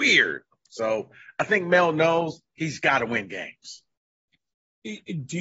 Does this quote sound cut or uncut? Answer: uncut